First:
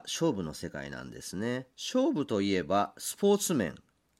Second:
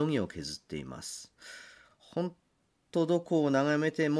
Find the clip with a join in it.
first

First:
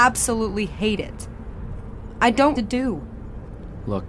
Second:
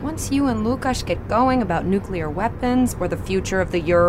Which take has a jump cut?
first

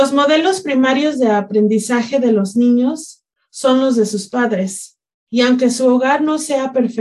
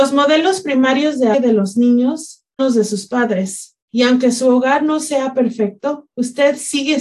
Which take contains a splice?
second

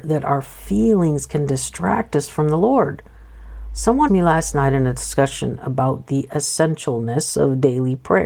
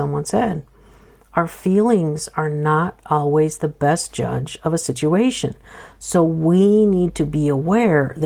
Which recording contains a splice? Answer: first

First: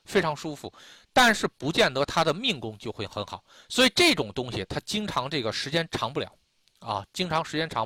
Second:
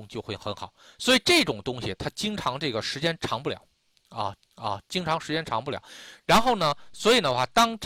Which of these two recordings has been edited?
second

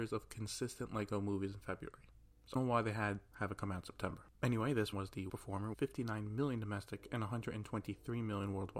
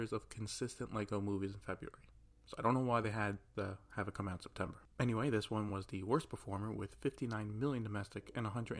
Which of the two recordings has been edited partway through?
first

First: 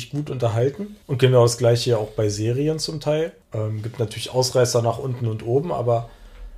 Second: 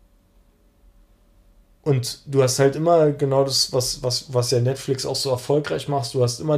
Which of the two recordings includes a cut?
first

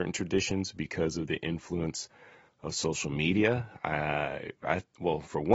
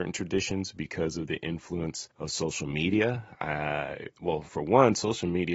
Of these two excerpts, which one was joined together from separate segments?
second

